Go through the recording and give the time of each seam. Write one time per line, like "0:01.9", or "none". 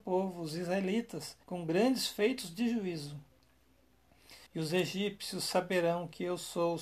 0:01.4
0:04.5

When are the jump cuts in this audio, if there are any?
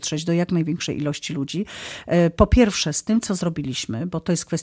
none

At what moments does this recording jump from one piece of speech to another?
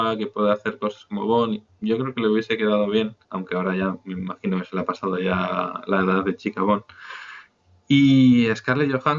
0:03.2

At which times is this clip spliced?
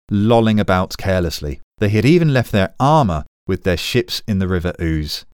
0:01.7

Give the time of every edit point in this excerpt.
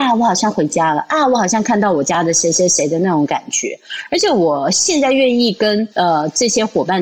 0:05.9

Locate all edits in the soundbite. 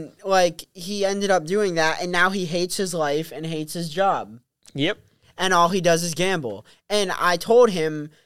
none

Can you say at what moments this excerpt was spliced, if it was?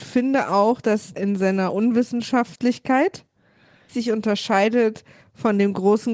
0:01.2
0:03.9

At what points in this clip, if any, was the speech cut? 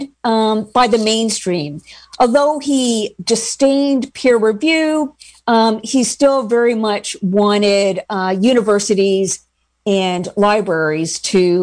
none

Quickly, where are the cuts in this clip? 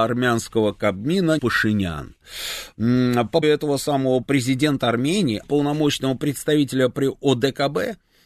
0:01.4
0:03.4
0:04.2
0:05.4

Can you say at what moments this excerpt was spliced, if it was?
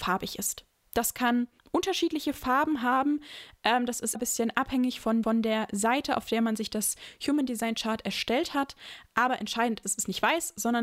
0:01.6
0:04.1
0:05.2
0:09.8

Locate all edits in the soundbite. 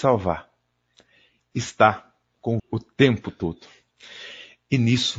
0:01.4
0:02.6

